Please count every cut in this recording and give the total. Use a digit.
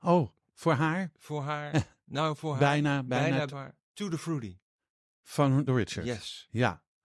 3